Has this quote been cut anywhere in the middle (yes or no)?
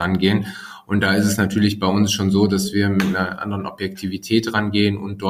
no